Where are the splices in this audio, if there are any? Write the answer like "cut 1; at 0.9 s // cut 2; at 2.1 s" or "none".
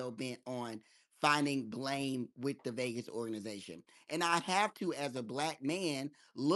none